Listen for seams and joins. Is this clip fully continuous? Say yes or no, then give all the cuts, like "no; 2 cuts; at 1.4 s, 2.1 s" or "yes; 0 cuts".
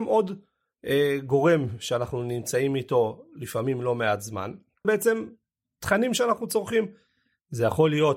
no; 1 cut; at 4.8 s